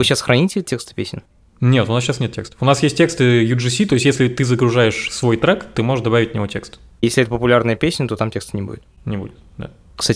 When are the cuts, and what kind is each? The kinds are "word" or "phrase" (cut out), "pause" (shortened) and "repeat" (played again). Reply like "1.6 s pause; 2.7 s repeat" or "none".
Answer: none